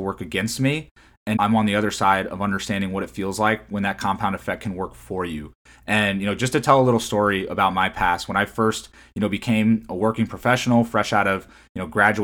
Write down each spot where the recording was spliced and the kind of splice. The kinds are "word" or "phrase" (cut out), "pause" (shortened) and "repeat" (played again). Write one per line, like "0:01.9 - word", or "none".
0:01.4 - word